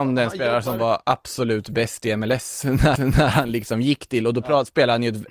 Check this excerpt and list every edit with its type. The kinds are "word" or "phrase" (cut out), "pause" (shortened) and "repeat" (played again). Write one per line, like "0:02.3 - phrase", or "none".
0:03.0 - repeat

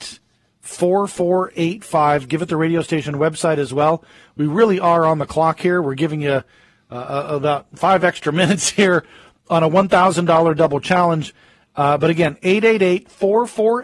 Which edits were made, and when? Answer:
none

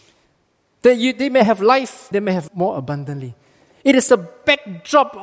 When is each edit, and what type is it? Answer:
0:02.1 - word
0:02.5 - word
0:04.1 - word

